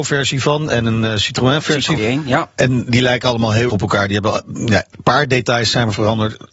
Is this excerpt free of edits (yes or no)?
no